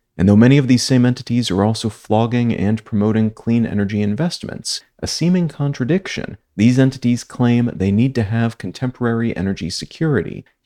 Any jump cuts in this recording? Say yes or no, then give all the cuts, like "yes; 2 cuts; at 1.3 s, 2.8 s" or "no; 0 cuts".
no; 0 cuts